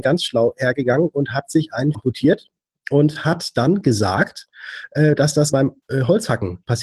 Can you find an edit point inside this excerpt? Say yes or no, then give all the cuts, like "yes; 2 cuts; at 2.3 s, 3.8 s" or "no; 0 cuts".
yes; 3 cuts; at 1.9 s, 5.5 s, 5.8 s